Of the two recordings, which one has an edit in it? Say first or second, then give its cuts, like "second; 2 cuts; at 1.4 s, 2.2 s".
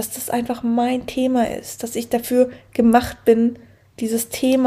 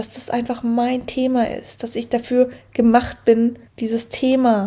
second; 1 cut; at 3.7 s